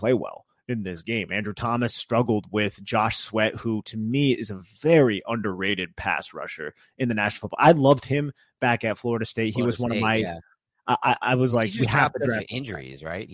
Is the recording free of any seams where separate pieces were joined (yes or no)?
yes